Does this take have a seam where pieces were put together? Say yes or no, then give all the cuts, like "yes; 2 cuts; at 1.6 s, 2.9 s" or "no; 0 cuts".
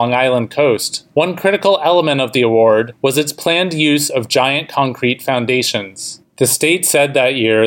no; 0 cuts